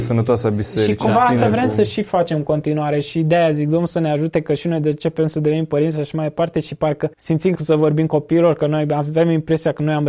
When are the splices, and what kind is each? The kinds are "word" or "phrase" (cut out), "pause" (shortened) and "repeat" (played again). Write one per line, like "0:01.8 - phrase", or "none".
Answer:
0:07.1 - pause
0:07.5 - phrase